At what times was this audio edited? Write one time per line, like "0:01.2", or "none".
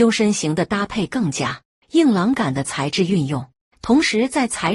none